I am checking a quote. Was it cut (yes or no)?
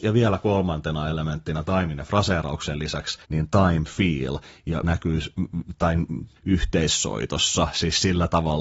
yes